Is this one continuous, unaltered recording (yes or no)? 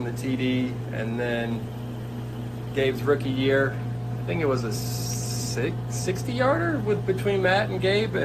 yes